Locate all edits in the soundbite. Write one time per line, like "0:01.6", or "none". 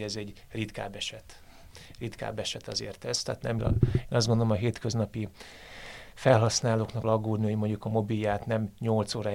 0:03.6
0:07.0